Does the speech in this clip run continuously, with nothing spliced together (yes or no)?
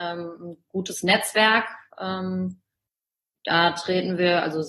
yes